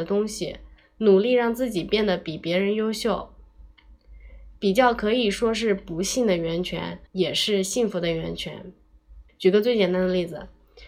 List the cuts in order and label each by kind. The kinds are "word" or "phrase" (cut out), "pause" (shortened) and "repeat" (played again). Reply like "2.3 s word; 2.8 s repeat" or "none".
7.1 s pause; 9.3 s pause